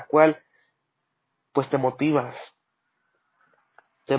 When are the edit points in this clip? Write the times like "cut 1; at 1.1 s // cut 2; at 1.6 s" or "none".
none